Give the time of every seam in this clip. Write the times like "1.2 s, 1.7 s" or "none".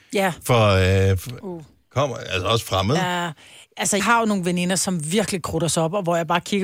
4.0 s